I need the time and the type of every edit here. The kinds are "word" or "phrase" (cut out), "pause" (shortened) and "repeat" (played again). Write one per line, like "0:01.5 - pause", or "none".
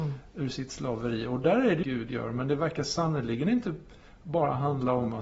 0:01.8 - phrase